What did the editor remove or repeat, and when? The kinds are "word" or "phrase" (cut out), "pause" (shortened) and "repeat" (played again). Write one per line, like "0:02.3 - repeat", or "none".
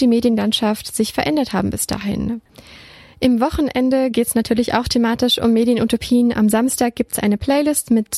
none

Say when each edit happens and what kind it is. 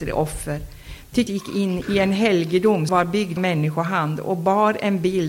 0:01.3 - word
0:01.8 - word
0:02.9 - word
0:03.4 - word

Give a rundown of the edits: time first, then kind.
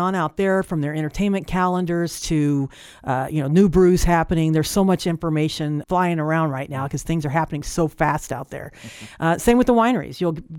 0:05.8 - word

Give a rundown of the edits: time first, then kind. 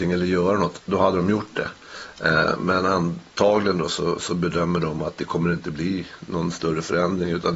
none

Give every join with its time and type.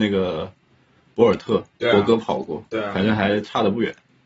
0:01.7 - pause

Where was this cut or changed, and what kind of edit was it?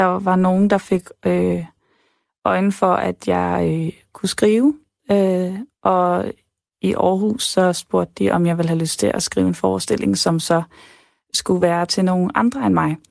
none

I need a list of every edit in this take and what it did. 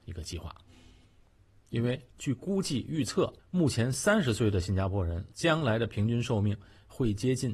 0:02.1 - pause
0:03.4 - pause
0:05.3 - pause

